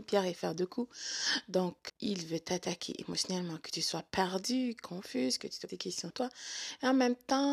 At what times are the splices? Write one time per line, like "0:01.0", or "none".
0:01.9
0:05.7
0:06.1